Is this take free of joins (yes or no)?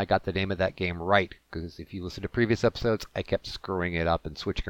yes